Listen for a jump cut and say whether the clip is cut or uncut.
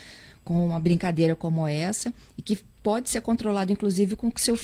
uncut